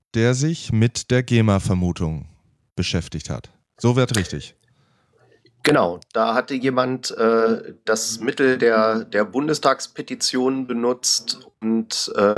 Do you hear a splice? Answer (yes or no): no